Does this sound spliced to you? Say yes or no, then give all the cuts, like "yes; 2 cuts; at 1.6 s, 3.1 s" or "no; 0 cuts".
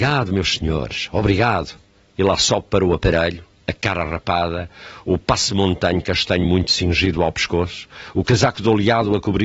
no; 0 cuts